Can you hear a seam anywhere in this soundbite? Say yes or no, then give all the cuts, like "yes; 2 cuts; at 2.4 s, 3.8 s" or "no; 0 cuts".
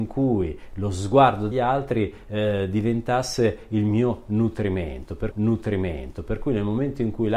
yes; 2 cuts; at 1.5 s, 5.3 s